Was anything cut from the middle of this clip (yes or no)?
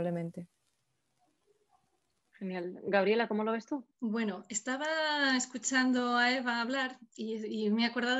yes